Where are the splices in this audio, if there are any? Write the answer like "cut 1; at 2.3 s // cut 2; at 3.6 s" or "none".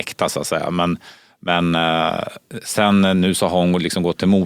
none